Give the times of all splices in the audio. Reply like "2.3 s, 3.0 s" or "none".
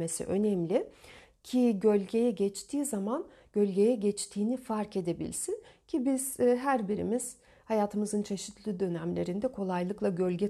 none